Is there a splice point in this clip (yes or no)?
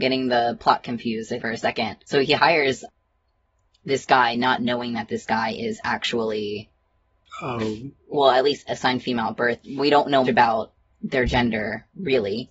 yes